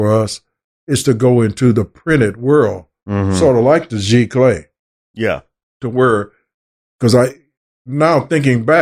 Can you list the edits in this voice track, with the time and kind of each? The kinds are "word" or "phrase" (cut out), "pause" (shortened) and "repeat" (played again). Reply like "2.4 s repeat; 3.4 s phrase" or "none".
none